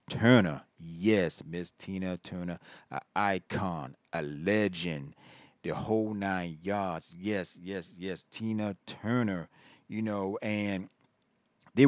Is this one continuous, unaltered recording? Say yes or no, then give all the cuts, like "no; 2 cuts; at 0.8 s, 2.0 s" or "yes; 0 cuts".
yes; 0 cuts